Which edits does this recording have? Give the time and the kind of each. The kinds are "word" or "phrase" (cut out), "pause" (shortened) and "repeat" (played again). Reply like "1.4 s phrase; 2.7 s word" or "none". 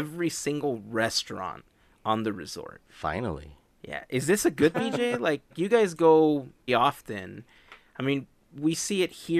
4.7 s word; 6.7 s word